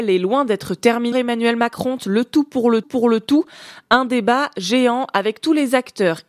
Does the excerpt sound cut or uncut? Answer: cut